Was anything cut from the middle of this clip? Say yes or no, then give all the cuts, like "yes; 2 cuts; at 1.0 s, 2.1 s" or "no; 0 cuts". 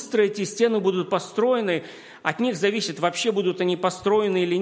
no; 0 cuts